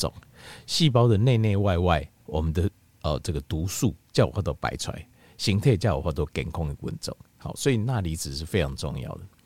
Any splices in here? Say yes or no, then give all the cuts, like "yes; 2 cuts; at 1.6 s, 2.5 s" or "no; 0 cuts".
no; 0 cuts